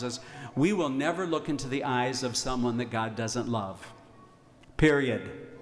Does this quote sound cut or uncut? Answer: uncut